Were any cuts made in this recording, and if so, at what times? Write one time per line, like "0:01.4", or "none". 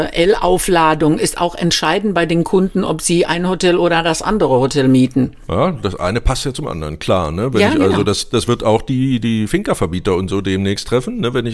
none